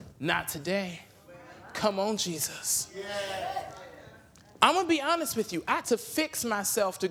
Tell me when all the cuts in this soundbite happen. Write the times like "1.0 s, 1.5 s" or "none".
5.8 s